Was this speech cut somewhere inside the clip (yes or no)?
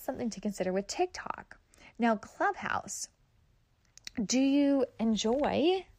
no